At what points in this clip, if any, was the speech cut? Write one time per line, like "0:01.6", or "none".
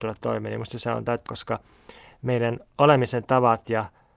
0:01.3